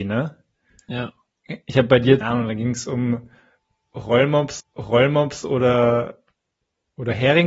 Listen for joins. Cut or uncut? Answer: cut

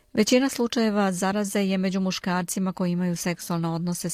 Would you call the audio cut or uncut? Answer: uncut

